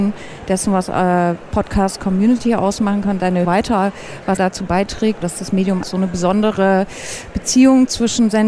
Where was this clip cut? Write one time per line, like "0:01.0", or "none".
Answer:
0:03.4
0:04.4
0:05.8

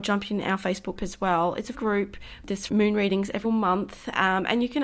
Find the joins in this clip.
0:01.0
0:01.7
0:02.7
0:03.4

